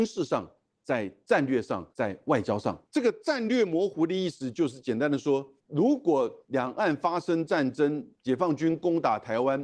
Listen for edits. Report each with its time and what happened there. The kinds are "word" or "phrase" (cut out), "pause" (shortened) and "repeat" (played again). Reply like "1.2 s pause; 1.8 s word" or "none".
1.9 s pause; 6.4 s pause

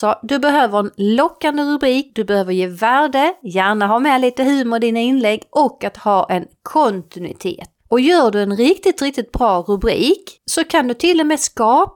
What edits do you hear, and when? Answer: 10.4 s pause

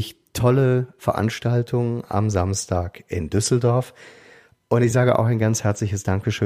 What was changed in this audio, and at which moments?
none

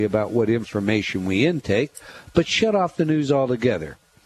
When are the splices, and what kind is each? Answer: none

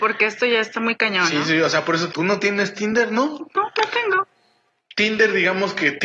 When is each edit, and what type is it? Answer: 2.1 s word

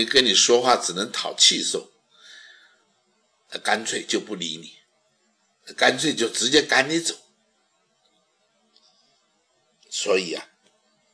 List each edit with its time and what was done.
none

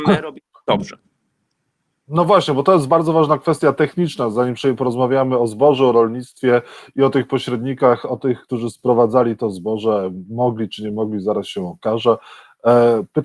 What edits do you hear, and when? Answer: none

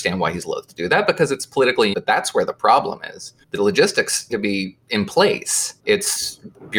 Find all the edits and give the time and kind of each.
1.9 s word; 3.4 s pause; 4.3 s word; 4.8 s pause; 5.8 s pause

